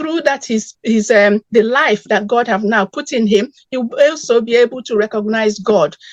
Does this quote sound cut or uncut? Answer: cut